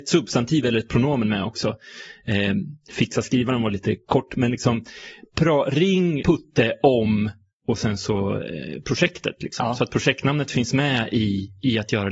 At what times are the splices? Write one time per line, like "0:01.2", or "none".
0:06.2